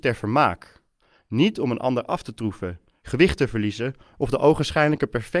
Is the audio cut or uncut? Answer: uncut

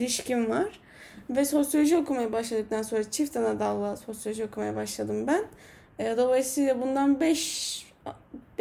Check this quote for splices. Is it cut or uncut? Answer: uncut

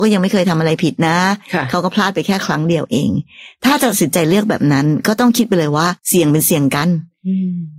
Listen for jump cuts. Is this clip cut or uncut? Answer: cut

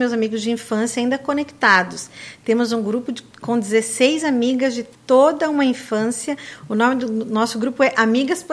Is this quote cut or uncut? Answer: cut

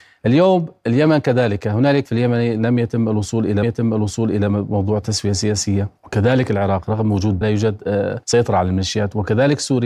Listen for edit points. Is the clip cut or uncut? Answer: cut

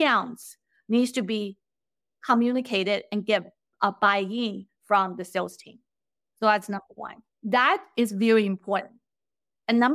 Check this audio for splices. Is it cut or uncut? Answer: uncut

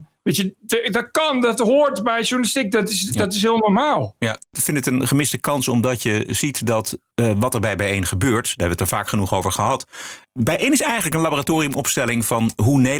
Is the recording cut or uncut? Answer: uncut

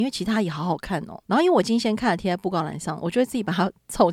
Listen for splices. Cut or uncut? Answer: cut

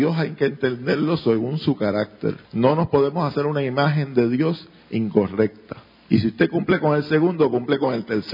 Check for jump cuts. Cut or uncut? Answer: cut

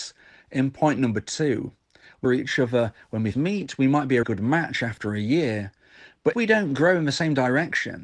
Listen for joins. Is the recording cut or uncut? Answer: cut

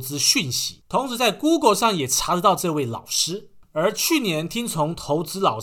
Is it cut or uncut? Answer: uncut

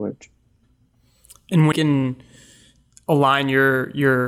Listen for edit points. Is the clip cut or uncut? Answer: cut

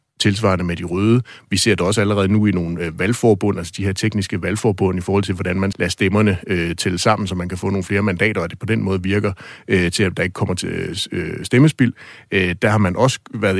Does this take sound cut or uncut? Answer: cut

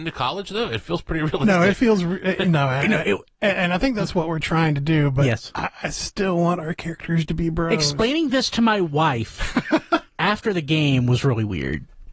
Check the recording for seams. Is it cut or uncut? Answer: uncut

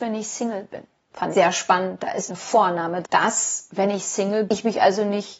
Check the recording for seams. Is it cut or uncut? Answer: cut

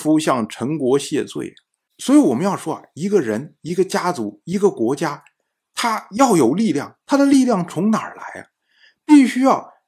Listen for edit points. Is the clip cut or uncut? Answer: uncut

